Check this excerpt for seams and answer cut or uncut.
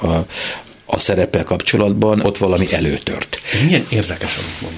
cut